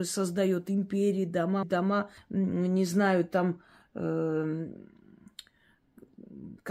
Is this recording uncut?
no; 2 cuts; at 1.6 s, 2.2 s

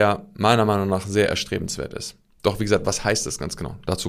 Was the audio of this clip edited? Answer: no; 0 cuts

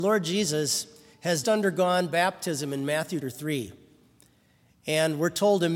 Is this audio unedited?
no; 2 cuts; at 1.4 s, 3.2 s

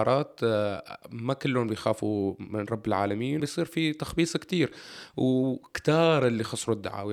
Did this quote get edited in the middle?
yes; 1 cut; at 3.4 s

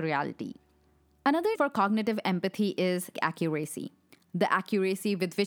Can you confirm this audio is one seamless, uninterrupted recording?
no; 2 cuts; at 1.5 s, 3.1 s

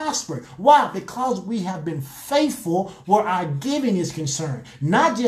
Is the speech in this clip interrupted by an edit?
no; 0 cuts

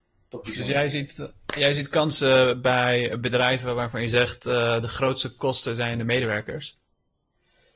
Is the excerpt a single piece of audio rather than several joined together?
yes; 0 cuts

